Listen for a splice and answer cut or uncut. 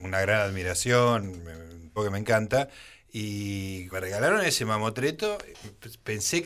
cut